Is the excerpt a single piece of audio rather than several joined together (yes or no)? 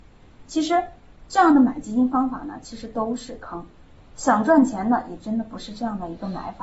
yes